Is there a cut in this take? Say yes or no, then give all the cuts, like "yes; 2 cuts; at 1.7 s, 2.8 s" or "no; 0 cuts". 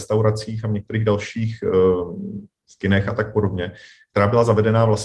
no; 0 cuts